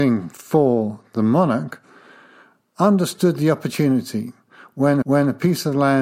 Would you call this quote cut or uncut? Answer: cut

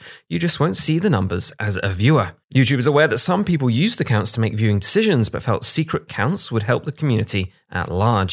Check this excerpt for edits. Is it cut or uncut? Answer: cut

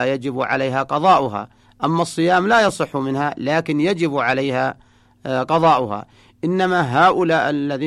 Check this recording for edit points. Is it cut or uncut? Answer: uncut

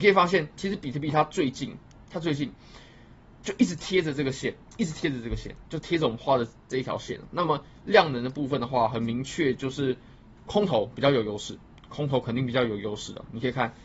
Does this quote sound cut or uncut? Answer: uncut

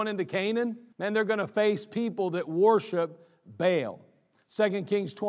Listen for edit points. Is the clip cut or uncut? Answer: cut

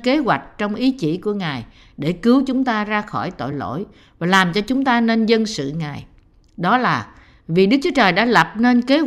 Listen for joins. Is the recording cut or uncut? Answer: uncut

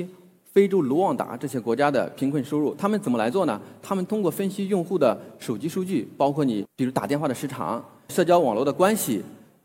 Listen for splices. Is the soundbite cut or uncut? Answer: uncut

